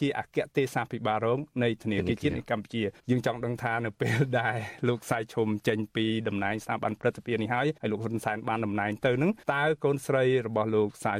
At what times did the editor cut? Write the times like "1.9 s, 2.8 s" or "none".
3.0 s, 7.8 s, 9.4 s